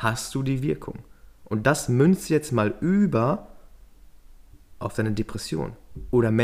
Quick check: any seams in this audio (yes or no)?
no